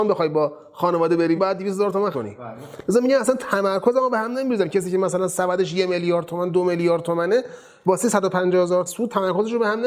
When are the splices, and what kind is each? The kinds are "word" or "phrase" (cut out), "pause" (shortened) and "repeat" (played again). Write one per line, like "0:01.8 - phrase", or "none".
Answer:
0:01.4 - word
0:02.1 - word
0:08.9 - word